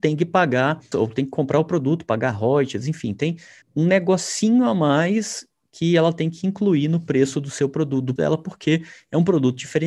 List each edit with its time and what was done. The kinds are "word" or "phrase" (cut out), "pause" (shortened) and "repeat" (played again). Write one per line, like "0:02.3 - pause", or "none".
0:00.9 - word
0:03.6 - word
0:08.2 - word